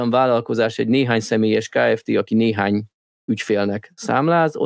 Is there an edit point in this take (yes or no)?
no